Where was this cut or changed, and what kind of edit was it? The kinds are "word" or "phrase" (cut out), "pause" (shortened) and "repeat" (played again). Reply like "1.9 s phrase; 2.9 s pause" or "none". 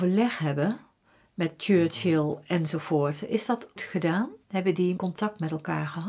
3.8 s word; 4.4 s pause; 5.0 s word